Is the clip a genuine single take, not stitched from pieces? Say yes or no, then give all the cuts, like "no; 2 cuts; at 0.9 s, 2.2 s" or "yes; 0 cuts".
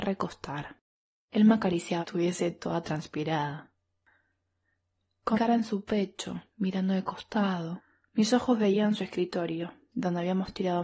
no; 4 cuts; at 0.9 s, 2.0 s, 5.3 s, 6.5 s